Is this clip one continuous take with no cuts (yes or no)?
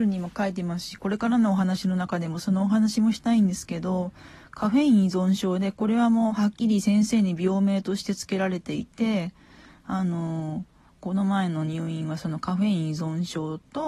yes